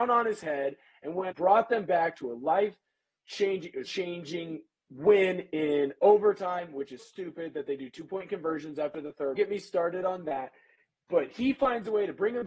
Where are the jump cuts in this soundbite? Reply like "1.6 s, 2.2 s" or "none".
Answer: 1.3 s, 3.8 s, 7.0 s, 9.3 s